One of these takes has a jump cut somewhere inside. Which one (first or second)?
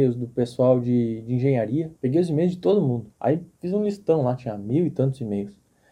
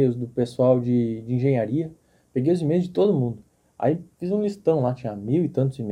first